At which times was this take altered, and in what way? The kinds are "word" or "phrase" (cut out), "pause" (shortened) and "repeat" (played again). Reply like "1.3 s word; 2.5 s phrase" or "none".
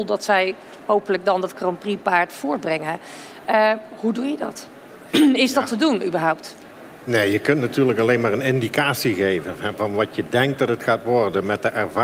none